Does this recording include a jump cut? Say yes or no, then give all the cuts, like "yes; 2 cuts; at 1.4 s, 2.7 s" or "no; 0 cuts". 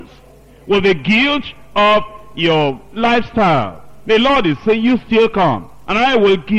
no; 0 cuts